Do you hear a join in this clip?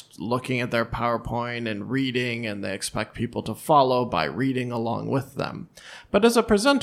no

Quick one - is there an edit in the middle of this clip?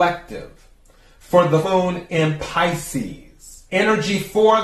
yes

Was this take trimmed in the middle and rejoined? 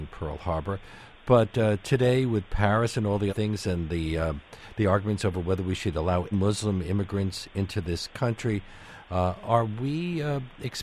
yes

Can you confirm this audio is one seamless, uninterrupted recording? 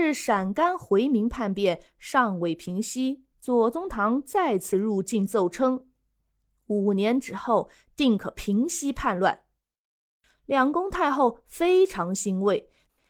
no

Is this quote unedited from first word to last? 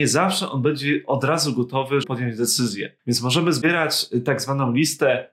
no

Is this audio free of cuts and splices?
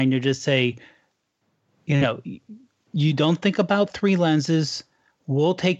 yes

